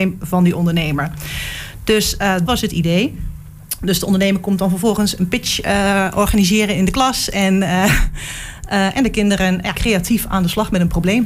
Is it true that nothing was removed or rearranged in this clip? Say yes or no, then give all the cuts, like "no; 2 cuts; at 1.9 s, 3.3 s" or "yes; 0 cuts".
no; 2 cuts; at 2.5 s, 9.7 s